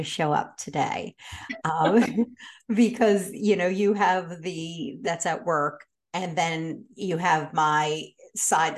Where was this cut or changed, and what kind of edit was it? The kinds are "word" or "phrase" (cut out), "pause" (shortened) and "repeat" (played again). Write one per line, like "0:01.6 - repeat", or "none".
0:05.0 - phrase